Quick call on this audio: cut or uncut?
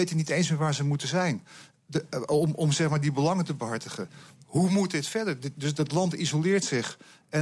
uncut